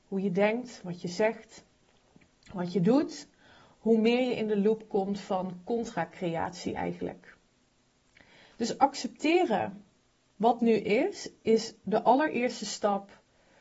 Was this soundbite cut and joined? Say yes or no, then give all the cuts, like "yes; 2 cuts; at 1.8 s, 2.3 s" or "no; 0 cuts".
no; 0 cuts